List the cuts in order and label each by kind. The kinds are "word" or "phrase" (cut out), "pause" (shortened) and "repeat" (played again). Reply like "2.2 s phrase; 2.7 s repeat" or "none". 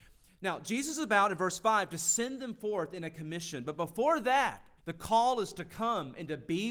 4.8 s pause